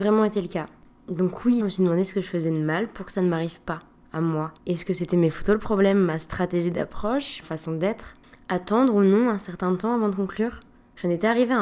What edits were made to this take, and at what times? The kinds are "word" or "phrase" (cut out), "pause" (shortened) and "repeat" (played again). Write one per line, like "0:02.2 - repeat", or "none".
0:01.6 - word
0:04.6 - pause
0:07.4 - word